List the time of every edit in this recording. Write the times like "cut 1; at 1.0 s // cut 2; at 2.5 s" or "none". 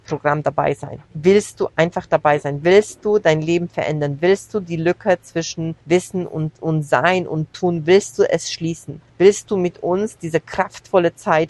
cut 1; at 1.1 s // cut 2; at 5.8 s // cut 3; at 6.5 s // cut 4; at 9.1 s